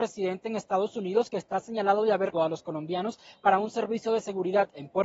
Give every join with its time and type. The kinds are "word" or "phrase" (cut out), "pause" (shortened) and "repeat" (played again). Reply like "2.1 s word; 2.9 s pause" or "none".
2.3 s word